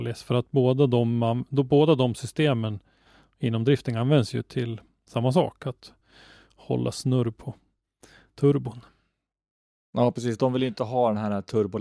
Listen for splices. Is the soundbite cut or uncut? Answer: uncut